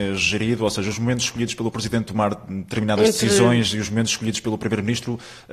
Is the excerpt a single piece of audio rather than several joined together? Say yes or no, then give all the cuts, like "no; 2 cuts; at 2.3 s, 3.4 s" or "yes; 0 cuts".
no; 1 cut; at 2.1 s